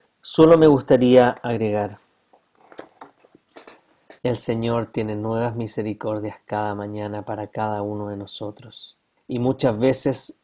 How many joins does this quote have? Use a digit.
2